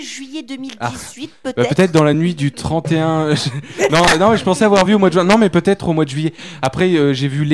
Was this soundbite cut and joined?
no; 0 cuts

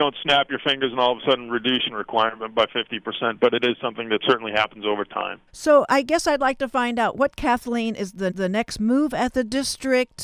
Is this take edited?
yes; 3 cuts; at 1.9 s, 5.5 s, 8.3 s

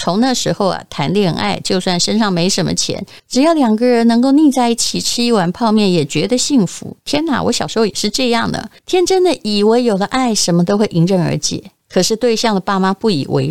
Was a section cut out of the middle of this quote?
yes; 3 cuts; at 3.2 s, 8.8 s, 11.8 s

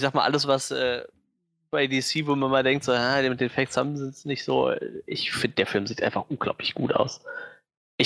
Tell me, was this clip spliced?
no; 0 cuts

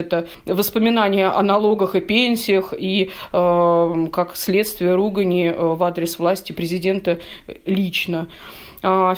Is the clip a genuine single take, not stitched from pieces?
yes; 0 cuts

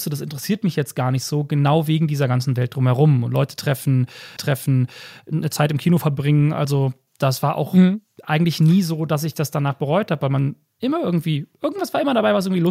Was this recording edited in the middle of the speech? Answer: yes; 1 cut; at 4.4 s

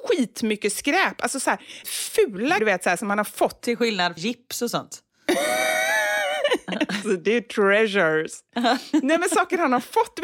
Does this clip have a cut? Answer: yes; 4 cuts; at 1.8 s, 2.6 s, 4.2 s, 7.0 s

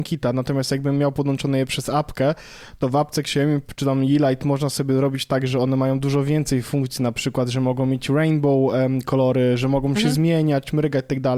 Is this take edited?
no; 0 cuts

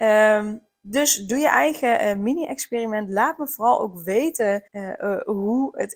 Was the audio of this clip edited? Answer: yes; 1 cut; at 4.7 s

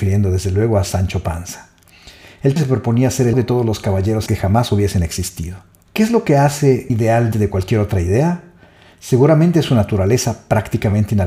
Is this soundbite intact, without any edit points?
no; 5 cuts; at 2.6 s, 3.3 s, 4.3 s, 6.9 s, 7.3 s

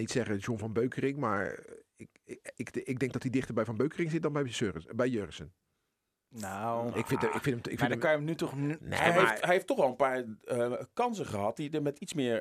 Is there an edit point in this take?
no; 0 cuts

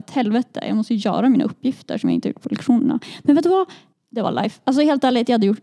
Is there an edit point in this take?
yes; 1 cut; at 3.9 s

